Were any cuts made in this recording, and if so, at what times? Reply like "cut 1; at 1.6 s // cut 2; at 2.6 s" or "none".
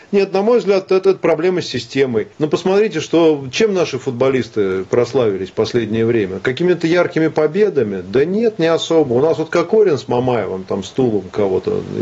cut 1; at 2.3 s